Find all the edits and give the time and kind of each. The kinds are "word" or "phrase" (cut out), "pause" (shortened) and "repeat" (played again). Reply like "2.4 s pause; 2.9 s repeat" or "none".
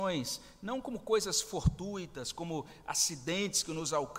none

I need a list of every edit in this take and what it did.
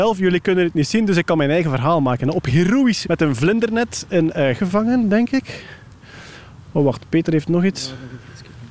3.1 s word; 4.6 s word

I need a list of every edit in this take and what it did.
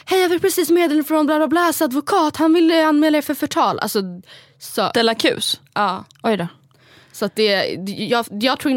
none

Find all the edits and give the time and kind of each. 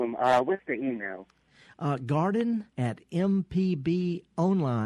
2.7 s pause

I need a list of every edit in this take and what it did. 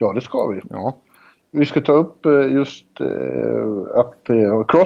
none

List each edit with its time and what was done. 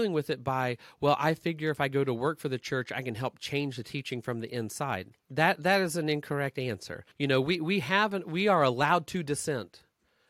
5.2 s pause; 7.1 s pause

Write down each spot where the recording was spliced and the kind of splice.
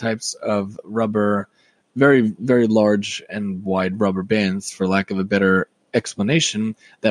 none

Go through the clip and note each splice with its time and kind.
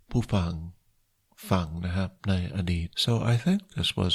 2.2 s pause; 2.9 s pause

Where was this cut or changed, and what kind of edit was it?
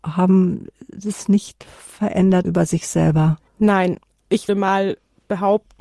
2.4 s phrase; 3.5 s pause; 4.5 s word

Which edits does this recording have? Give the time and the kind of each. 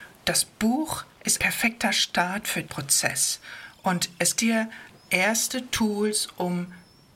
1.4 s word; 2.6 s word; 4.4 s word

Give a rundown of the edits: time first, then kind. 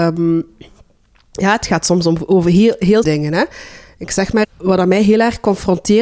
3.0 s word; 4.4 s word

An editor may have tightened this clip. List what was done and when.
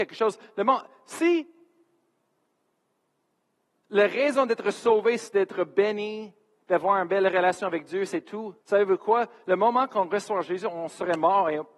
8.6 s pause

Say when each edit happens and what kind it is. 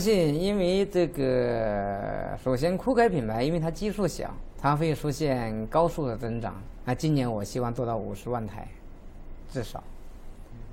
4.5 s word

